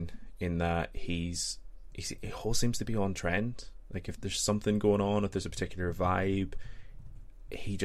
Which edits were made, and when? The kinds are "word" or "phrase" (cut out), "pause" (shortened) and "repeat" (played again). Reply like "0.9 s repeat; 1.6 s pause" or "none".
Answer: 4.2 s word